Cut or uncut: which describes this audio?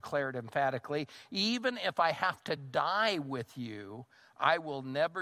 uncut